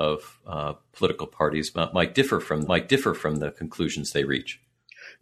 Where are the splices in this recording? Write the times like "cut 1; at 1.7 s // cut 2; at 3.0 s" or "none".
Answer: cut 1; at 2.6 s